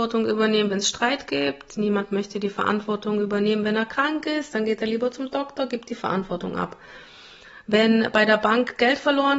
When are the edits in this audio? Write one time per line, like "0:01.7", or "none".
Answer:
none